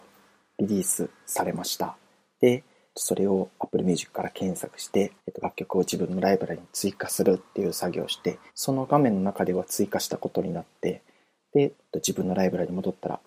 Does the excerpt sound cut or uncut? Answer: cut